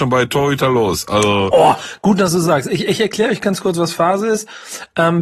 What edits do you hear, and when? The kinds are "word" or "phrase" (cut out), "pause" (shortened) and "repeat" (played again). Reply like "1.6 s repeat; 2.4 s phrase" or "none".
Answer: none